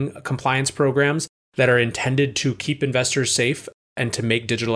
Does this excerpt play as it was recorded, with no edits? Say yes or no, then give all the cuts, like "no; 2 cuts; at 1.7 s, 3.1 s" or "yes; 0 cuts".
yes; 0 cuts